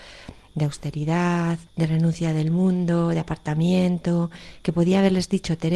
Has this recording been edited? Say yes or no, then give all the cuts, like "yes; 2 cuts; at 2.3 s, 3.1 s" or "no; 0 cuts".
yes; 1 cut; at 1.7 s